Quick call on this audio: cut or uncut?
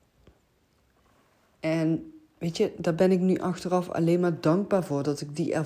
uncut